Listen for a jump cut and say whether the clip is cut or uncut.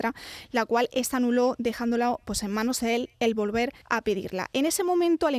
cut